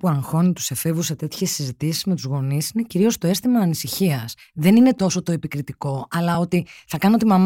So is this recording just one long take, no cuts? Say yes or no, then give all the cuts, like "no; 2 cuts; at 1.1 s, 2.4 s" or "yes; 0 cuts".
yes; 0 cuts